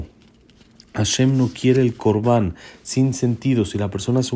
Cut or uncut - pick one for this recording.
uncut